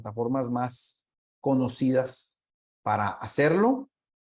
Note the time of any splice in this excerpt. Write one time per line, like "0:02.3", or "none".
none